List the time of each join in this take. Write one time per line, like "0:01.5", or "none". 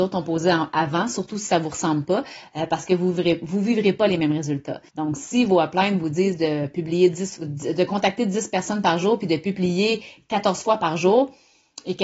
0:04.9